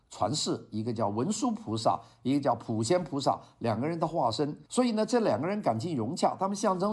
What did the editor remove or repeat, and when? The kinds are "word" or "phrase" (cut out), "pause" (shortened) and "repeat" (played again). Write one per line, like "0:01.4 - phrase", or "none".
0:04.7 - pause